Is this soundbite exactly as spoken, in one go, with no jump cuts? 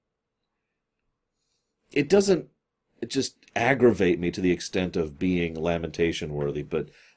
yes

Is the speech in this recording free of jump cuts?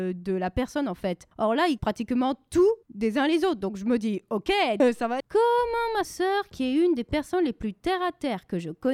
no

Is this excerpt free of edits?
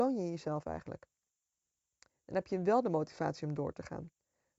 yes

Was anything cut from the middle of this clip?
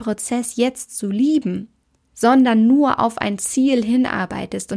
no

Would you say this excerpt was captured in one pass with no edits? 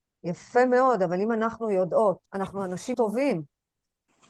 no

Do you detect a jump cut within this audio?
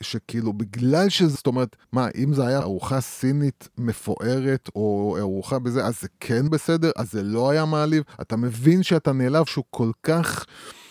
yes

